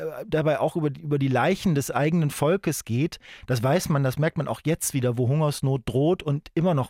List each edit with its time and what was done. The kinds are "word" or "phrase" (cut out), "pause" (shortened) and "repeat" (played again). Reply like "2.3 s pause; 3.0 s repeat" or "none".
none